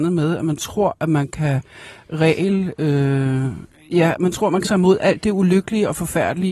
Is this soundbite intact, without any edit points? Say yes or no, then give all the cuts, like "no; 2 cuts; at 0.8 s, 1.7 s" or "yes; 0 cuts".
no; 1 cut; at 4.6 s